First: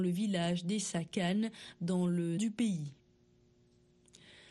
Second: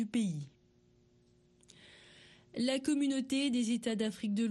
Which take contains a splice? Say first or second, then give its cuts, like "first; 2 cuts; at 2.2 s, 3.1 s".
first; 1 cut; at 2.4 s